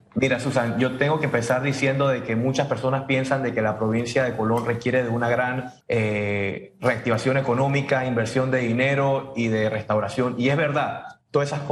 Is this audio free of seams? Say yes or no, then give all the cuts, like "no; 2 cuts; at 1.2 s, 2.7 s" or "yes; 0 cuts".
no; 1 cut; at 5.8 s